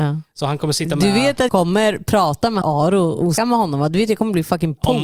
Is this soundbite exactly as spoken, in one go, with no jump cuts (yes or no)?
no